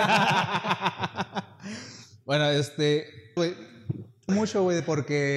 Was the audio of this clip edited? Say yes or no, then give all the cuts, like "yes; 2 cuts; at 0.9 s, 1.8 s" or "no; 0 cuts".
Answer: yes; 2 cuts; at 3.4 s, 4.3 s